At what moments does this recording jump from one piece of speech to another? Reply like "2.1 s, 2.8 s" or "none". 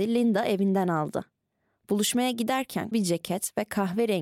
2.9 s